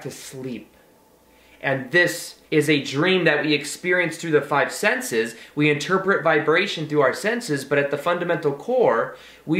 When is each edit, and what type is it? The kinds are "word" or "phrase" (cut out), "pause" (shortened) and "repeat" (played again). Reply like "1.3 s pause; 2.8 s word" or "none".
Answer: 2.5 s pause